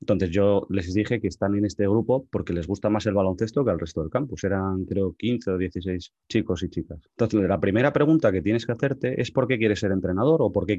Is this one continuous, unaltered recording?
no; 1 cut; at 7.1 s

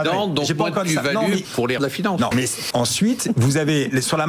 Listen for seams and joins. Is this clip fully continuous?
no; 4 cuts; at 1.4 s, 1.8 s, 2.3 s, 2.7 s

